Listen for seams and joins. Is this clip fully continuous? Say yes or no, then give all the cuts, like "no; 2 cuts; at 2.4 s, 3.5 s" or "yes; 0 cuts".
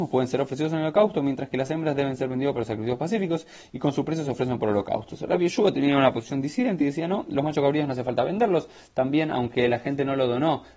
yes; 0 cuts